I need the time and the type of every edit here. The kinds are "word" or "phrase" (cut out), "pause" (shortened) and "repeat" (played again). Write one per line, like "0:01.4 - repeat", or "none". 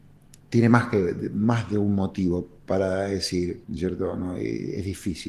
0:03.6 - pause